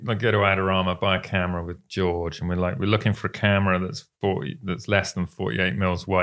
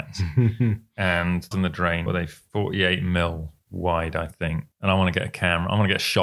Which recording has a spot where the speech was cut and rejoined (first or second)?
second